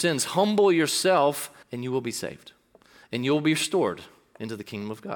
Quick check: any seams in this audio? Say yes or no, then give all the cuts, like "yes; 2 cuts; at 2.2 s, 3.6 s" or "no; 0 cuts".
yes; 1 cut; at 1.6 s